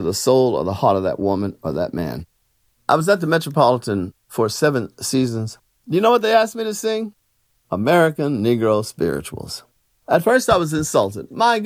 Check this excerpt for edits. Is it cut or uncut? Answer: uncut